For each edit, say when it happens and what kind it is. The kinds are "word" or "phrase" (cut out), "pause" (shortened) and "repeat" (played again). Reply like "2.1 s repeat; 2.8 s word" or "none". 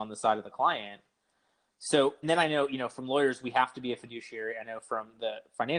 2.2 s word